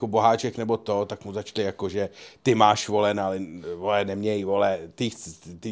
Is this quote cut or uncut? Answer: uncut